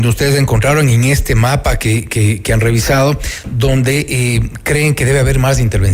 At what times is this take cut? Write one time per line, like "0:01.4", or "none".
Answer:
none